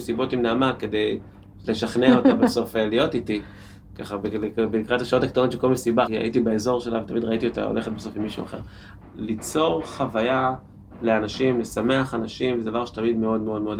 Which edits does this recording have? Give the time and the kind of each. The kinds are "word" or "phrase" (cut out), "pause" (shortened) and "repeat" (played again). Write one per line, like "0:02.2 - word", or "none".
none

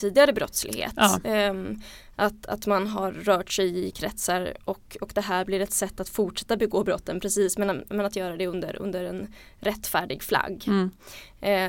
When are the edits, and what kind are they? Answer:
none

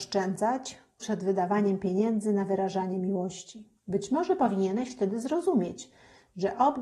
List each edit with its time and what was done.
0:01.0 - phrase
0:03.8 - pause

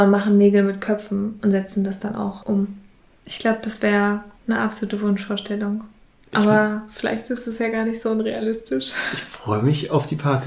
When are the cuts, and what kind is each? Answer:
none

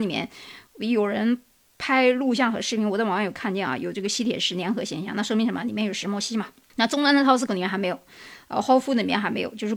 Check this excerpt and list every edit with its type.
0:07.5 - word

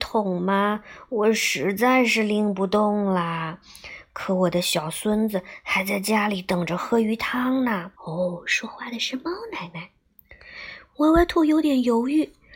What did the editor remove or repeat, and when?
0:08.0 - pause

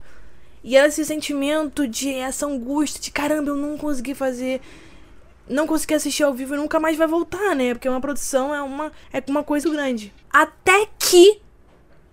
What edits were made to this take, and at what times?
0:09.0 - pause
0:09.6 - word
0:10.2 - pause

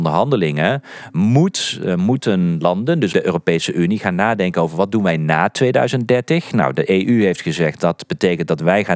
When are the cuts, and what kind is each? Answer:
0:03.1 - word

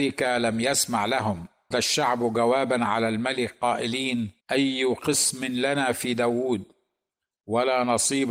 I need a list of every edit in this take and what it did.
0:01.7 - word
0:04.4 - pause

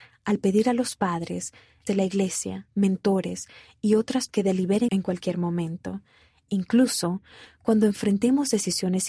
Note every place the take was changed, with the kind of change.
0:01.9 - word
0:04.3 - word
0:04.9 - phrase

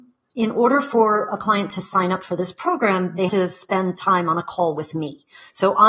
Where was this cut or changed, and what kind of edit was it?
0:03.3 - word

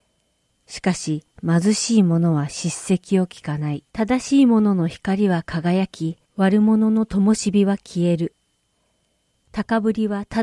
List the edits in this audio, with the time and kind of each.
0:01.3 - pause
0:03.9 - pause
0:06.3 - pause

